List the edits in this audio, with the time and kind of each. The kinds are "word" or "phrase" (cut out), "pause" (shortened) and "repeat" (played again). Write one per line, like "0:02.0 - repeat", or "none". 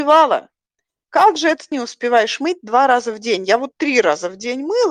0:01.7 - word

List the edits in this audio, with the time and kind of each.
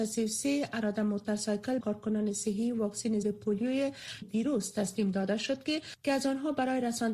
0:01.8 - word
0:03.2 - word
0:04.2 - phrase

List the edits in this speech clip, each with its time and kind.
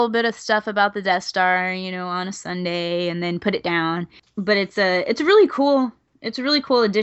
none

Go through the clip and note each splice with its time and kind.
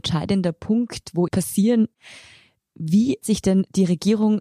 0:01.3 - phrase
0:03.2 - word

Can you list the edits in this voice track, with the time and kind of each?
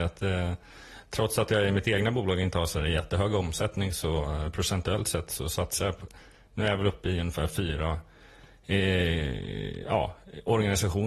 none

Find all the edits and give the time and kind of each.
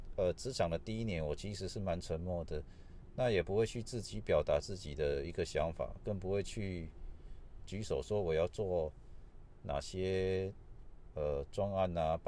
0:07.6 - word

